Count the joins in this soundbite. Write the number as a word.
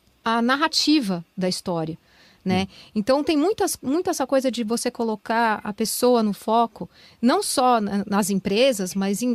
zero